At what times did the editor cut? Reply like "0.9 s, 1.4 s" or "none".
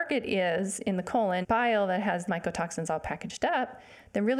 1.4 s, 2.3 s